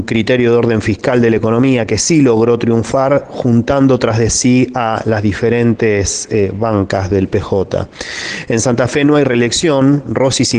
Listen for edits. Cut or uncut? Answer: uncut